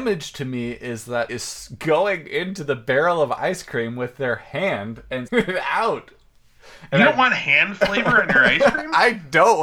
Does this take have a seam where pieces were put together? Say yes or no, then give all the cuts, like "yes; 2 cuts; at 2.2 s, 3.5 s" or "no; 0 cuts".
yes; 2 cuts; at 1.3 s, 5.3 s